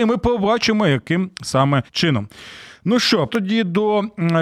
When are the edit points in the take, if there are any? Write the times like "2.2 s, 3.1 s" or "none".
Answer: 1.9 s, 3.3 s